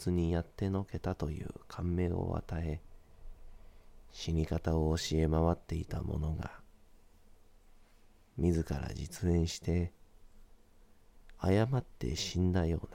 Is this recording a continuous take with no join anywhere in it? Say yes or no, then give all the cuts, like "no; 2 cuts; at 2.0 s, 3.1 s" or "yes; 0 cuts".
yes; 0 cuts